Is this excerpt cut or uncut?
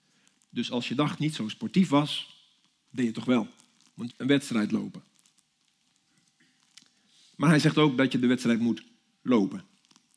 cut